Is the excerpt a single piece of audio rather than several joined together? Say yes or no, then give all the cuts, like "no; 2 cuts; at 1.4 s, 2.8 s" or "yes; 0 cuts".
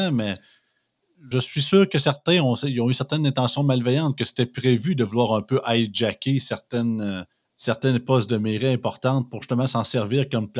no; 2 cuts; at 1.3 s, 7.3 s